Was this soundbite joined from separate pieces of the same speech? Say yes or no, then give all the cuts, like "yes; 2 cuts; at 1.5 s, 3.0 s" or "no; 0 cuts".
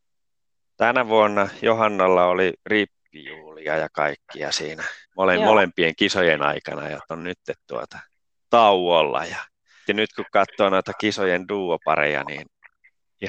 yes; 5 cuts; at 2.6 s, 5.0 s, 7.1 s, 8.2 s, 9.9 s